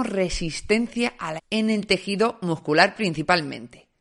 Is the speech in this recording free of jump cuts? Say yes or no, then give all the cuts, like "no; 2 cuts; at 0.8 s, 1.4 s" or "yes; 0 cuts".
no; 1 cut; at 1.4 s